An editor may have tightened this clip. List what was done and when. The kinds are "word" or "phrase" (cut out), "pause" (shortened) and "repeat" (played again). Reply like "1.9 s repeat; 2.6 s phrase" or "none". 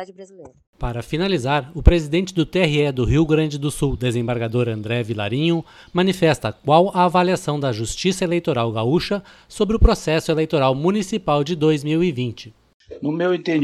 none